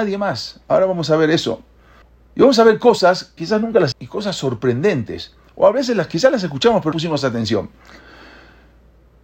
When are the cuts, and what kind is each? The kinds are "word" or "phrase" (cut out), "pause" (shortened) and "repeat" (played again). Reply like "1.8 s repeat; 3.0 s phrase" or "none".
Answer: 2.0 s pause; 3.4 s word; 3.9 s word; 6.9 s word